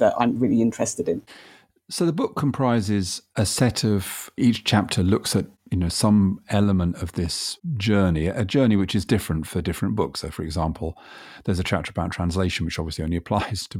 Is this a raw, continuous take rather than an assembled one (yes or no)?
yes